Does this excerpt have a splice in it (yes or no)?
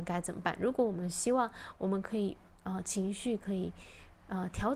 no